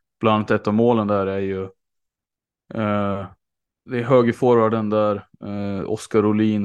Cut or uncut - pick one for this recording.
uncut